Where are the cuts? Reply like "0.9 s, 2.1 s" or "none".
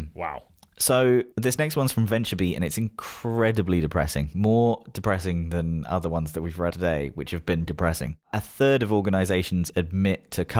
1.3 s, 6.7 s, 7.7 s